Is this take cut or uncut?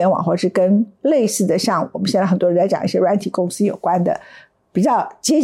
uncut